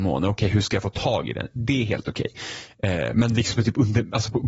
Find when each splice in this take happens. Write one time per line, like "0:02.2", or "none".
0:03.5